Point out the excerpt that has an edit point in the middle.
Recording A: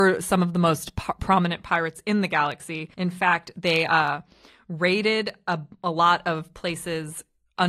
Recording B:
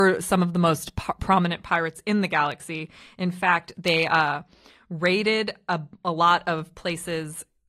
A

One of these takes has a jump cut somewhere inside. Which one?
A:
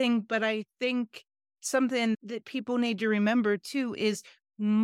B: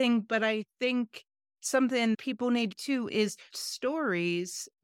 B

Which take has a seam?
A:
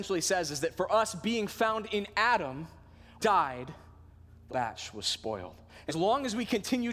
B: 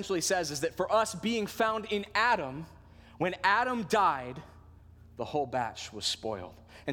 A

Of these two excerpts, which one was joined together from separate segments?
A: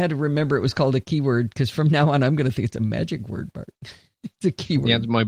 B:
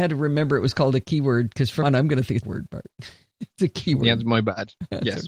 B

